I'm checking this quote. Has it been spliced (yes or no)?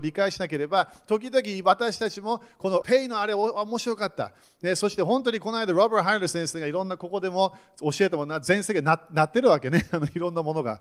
yes